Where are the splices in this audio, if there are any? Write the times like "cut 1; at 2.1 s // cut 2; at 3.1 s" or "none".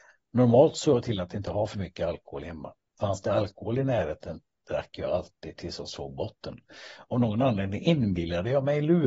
cut 1; at 2.9 s